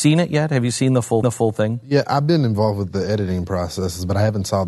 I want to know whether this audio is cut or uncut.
cut